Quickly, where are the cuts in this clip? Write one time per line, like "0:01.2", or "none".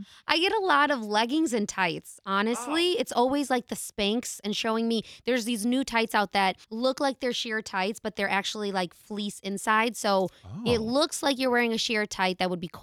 0:06.6